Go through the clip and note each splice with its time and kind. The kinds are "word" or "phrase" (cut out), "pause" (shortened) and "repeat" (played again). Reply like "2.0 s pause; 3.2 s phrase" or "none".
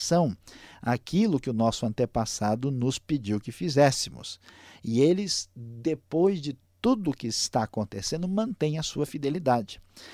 none

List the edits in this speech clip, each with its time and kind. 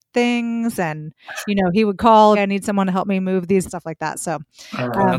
2.3 s phrase; 3.7 s phrase

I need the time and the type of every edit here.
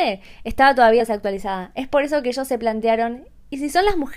1.0 s word

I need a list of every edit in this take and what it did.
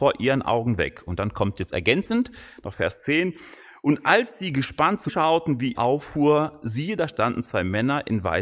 5.1 s word; 5.7 s word

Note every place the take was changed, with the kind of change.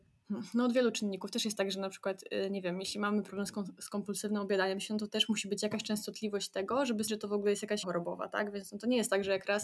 7.1 s word; 7.8 s word

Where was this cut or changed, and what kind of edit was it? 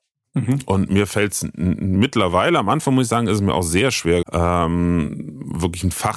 4.2 s word

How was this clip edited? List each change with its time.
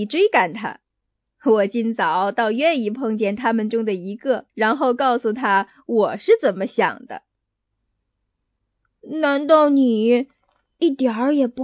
4.5 s pause

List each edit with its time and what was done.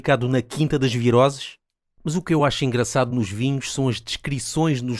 none

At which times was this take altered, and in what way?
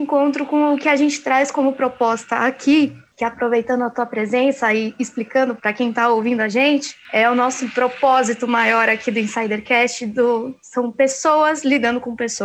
5.6 s word

